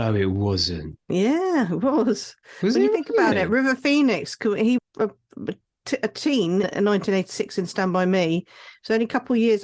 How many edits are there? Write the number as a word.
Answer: two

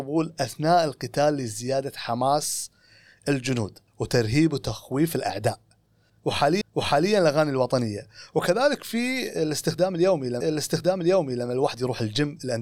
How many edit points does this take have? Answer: three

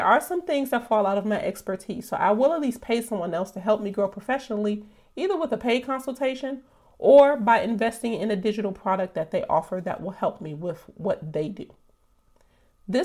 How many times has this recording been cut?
zero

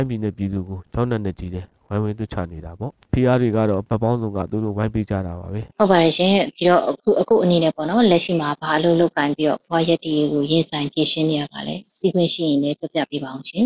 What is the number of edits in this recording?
three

